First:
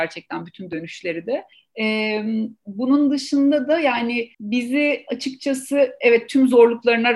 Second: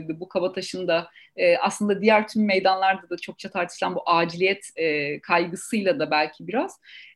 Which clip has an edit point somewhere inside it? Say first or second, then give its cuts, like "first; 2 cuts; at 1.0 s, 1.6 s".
first; 2 cuts; at 1.5 s, 4.3 s